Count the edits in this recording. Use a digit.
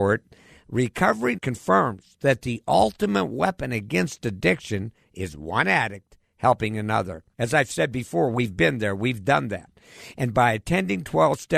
2